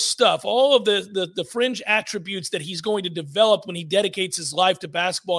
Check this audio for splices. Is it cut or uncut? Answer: uncut